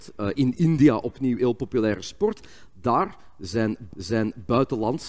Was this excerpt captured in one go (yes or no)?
no